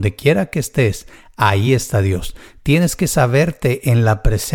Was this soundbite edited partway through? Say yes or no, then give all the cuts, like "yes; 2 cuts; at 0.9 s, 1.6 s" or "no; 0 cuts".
no; 0 cuts